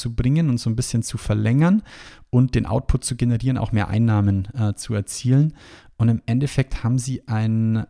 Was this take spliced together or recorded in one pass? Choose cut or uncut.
uncut